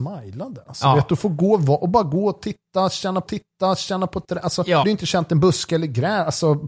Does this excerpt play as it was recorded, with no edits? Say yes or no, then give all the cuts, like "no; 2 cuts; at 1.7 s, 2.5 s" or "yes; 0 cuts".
no; 2 cuts; at 3.3 s, 4.8 s